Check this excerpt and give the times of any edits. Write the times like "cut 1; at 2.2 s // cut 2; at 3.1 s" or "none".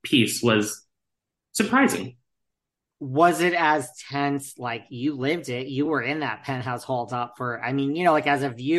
none